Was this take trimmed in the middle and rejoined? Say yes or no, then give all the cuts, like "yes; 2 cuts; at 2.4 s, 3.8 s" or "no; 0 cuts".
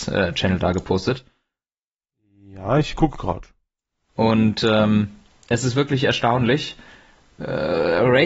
no; 0 cuts